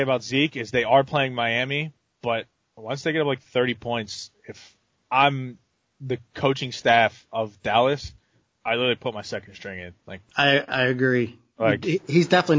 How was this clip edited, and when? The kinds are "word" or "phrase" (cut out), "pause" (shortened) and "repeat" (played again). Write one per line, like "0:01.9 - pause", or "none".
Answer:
none